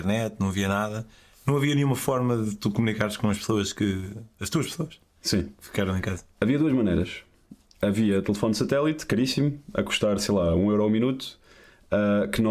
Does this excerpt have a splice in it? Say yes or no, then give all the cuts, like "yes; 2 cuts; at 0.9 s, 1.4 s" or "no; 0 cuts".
no; 0 cuts